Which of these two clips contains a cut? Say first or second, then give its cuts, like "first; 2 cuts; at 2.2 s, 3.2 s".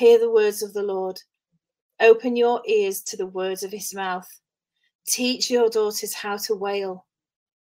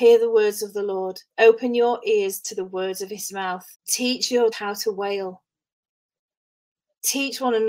second; 3 cuts; at 1.3 s, 3.7 s, 4.5 s